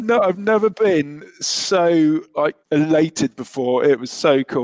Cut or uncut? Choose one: cut